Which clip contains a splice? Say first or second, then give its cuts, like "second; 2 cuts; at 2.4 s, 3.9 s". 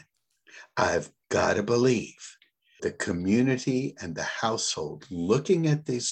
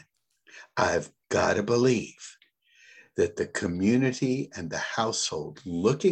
first; 1 cut; at 2.8 s